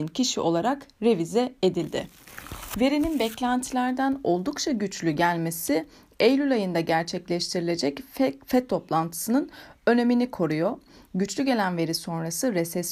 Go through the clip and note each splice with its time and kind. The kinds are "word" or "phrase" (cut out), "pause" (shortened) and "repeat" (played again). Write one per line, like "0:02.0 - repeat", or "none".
none